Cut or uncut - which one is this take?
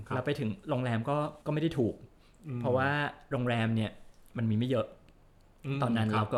cut